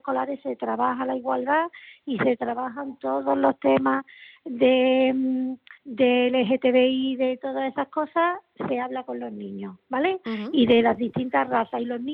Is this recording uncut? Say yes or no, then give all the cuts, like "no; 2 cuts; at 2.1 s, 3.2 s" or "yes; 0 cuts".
no; 1 cut; at 5.8 s